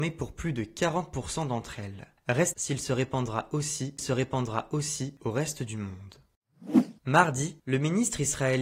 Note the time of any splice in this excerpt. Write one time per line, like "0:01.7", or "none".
0:02.5
0:04.0
0:07.0